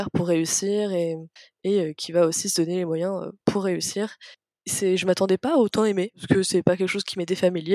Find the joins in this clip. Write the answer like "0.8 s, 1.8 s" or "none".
none